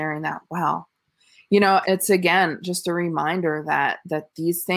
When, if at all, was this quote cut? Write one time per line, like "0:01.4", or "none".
0:01.8